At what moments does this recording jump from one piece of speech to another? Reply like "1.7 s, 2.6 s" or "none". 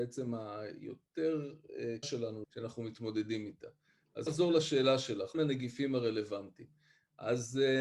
2.0 s, 2.4 s, 4.3 s, 5.3 s